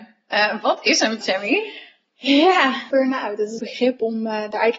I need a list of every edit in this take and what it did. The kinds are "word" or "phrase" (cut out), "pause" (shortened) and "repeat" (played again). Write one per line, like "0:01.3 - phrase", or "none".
0:01.2 - word
0:02.9 - phrase
0:03.6 - phrase